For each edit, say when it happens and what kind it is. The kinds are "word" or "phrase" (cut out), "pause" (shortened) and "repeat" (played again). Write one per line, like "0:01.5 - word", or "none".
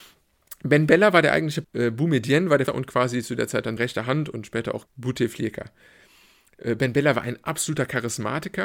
0:01.6 - word
0:02.7 - word
0:03.8 - word
0:04.8 - word